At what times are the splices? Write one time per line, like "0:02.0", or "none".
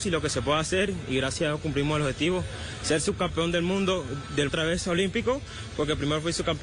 0:04.5